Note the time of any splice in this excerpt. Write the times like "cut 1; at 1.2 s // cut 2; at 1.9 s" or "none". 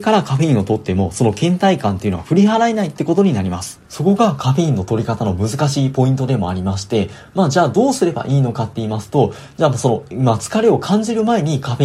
cut 1; at 3.8 s